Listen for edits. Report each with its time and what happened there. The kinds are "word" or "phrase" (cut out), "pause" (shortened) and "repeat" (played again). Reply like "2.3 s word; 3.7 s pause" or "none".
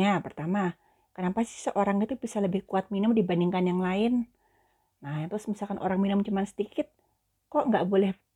none